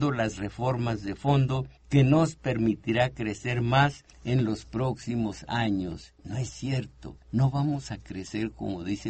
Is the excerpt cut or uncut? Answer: cut